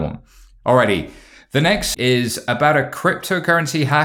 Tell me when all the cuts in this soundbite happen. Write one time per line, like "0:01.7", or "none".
0:01.9